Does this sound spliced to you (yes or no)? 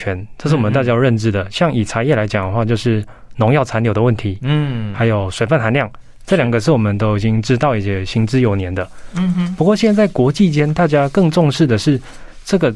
no